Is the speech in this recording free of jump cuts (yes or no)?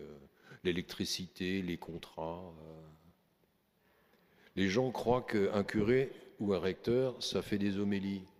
yes